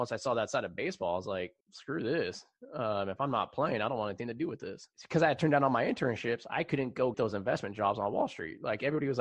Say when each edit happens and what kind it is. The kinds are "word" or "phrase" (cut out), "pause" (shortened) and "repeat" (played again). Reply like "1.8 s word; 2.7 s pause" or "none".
1.6 s pause; 4.9 s pause; 7.1 s word